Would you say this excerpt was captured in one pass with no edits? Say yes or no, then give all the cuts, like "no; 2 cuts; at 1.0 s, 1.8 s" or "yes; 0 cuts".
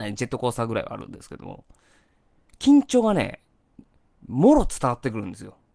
yes; 0 cuts